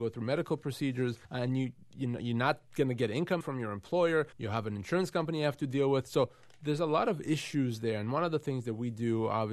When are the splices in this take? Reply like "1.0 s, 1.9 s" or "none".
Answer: 1.2 s, 3.4 s, 4.3 s